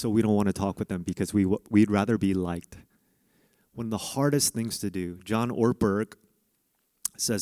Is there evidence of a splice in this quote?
no; 0 cuts

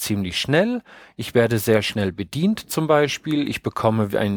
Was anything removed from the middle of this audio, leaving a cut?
no; 0 cuts

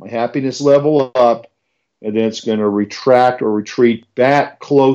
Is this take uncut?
yes; 0 cuts

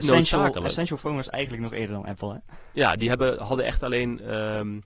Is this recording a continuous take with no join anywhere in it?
yes; 0 cuts

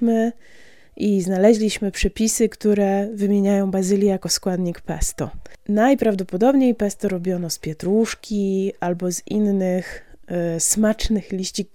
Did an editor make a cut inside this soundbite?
no; 0 cuts

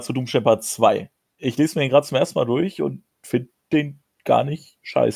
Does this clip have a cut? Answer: yes; 1 cut; at 1.2 s

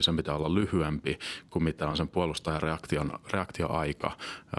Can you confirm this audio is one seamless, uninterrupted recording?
yes; 0 cuts

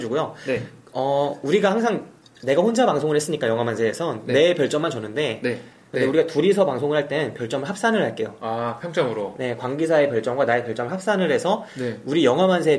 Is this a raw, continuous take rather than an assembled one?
yes; 0 cuts

